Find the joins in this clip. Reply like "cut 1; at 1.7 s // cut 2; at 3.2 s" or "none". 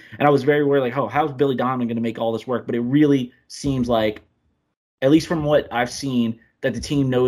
none